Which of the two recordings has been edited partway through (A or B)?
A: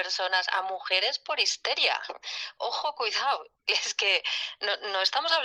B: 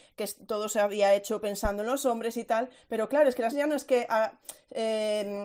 B